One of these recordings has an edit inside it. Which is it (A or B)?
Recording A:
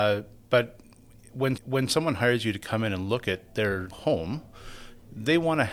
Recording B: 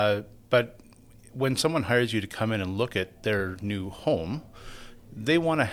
A